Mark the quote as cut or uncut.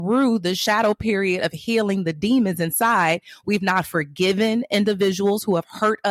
uncut